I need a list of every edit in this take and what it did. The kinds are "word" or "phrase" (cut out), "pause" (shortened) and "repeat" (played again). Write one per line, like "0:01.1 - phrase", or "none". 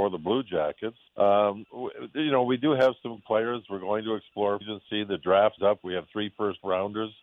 0:01.1 - pause
0:03.2 - word
0:04.6 - word
0:05.6 - word